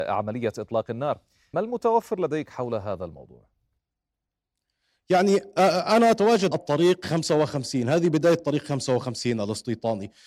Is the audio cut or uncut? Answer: cut